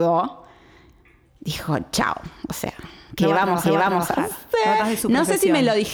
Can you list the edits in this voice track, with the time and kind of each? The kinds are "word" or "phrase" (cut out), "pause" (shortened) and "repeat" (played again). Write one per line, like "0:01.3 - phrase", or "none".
0:03.6 - repeat
0:04.8 - word